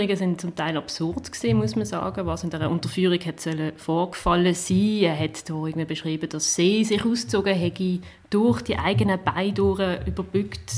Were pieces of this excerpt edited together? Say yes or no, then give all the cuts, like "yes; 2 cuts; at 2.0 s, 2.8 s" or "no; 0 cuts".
no; 0 cuts